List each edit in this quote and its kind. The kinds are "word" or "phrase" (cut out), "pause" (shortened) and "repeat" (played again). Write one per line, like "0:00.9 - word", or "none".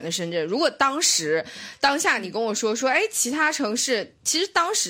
none

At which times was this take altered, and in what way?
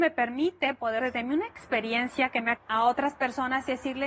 0:01.0 - word
0:02.6 - phrase

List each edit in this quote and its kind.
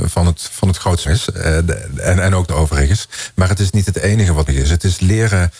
0:01.0 - word
0:02.5 - word
0:04.5 - word

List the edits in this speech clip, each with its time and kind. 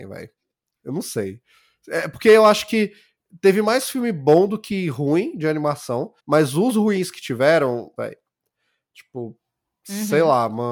0:06.2 - pause
0:08.0 - phrase

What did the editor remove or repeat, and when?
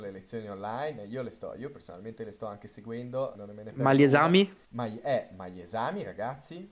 0:03.3 - word
0:04.6 - pause

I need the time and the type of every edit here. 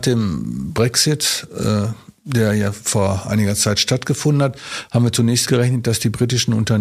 0:05.4 - word

